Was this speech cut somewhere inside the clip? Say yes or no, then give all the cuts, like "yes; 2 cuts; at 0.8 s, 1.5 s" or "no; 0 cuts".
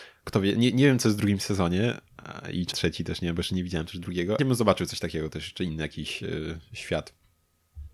yes; 2 cuts; at 2.7 s, 4.4 s